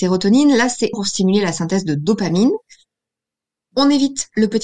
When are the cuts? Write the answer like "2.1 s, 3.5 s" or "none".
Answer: 0.9 s